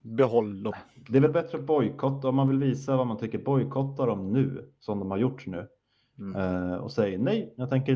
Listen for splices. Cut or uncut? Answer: uncut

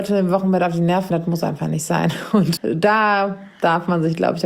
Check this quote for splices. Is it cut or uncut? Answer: cut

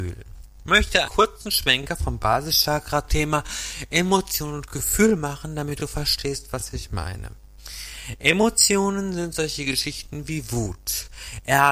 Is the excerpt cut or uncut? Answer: cut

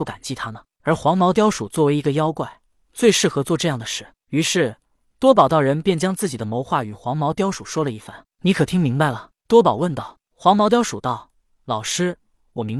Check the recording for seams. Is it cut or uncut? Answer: uncut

